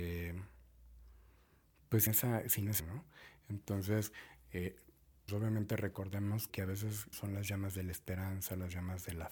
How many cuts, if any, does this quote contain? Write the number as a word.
five